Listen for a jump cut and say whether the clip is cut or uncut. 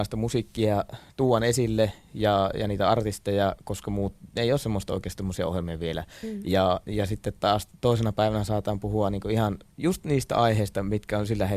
uncut